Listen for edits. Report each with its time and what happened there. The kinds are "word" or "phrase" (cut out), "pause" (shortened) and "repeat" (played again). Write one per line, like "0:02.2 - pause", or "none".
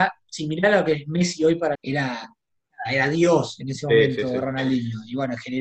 0:01.7 - phrase

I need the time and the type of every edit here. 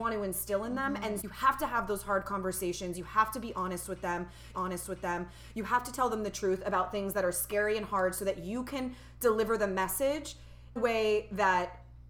0:01.2 - word
0:04.5 - repeat
0:10.8 - phrase

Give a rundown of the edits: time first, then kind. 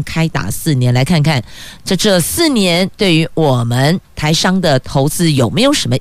0:04.0 - pause

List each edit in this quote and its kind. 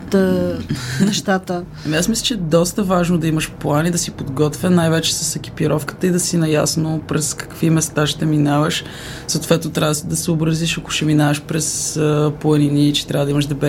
none

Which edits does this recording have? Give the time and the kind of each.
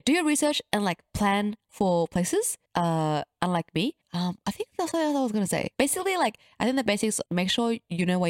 0:02.7 - pause
0:04.0 - pause
0:05.7 - pause
0:07.3 - pause

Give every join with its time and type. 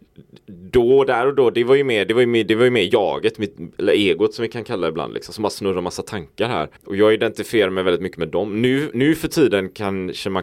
0:06.8 - pause

